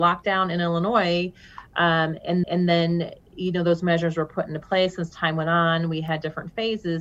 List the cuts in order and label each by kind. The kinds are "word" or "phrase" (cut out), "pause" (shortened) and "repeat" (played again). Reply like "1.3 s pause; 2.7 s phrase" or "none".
2.4 s repeat